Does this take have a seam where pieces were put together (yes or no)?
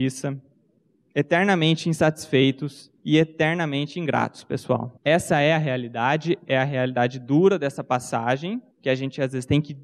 yes